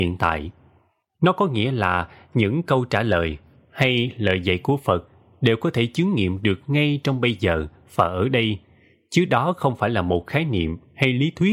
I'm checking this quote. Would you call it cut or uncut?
uncut